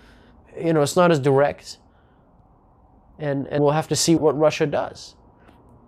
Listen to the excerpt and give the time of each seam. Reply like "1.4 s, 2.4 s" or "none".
3.6 s, 4.2 s